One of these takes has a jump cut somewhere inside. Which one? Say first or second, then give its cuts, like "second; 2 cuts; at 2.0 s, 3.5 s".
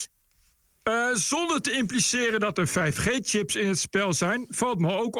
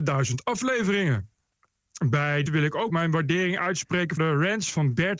second; 3 cuts; at 2.5 s, 2.9 s, 4.2 s